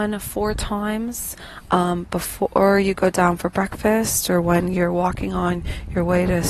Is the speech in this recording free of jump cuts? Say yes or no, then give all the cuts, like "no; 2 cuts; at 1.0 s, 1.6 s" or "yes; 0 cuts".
yes; 0 cuts